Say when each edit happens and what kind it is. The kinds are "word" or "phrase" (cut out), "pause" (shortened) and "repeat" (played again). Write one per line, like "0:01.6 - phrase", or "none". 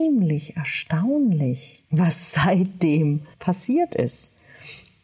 0:01.8 - pause
0:03.3 - pause